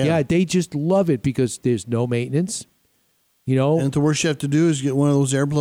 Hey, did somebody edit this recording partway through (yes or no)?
no